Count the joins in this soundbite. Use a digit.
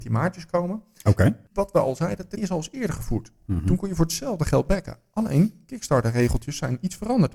1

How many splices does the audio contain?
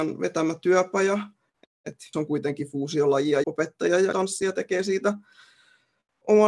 3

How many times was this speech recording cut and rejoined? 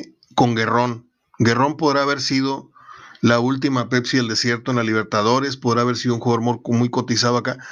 0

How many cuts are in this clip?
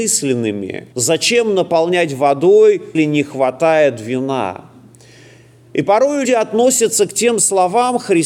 3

